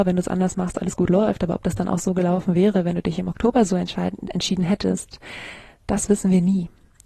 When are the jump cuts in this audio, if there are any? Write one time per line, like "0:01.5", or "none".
none